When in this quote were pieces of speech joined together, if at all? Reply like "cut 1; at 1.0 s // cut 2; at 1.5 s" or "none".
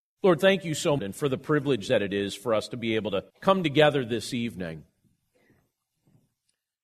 cut 1; at 1.0 s // cut 2; at 3.3 s